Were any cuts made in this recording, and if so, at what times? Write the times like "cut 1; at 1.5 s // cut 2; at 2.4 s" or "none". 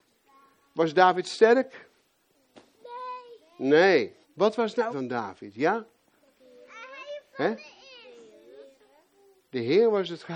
cut 1; at 4.2 s // cut 2; at 4.9 s